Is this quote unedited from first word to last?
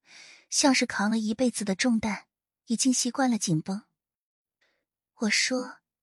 yes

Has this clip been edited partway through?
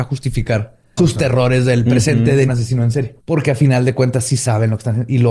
yes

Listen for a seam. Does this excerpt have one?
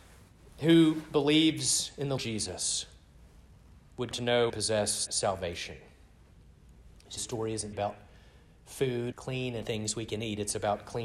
yes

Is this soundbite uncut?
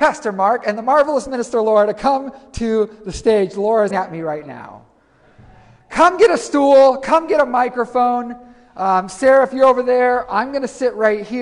no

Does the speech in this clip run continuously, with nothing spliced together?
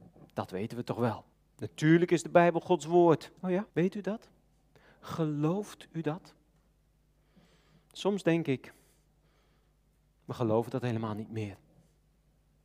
no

